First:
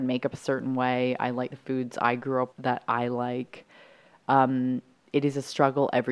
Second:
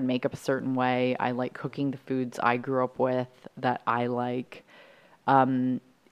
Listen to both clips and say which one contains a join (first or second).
first